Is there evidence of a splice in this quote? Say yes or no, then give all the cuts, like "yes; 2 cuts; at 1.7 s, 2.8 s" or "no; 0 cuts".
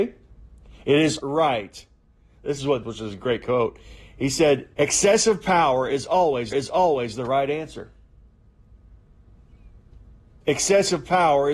yes; 4 cuts; at 1.2 s, 2.8 s, 4.7 s, 6.5 s